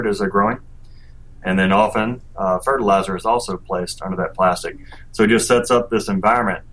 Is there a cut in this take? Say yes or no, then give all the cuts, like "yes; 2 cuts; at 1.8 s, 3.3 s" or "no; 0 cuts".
no; 0 cuts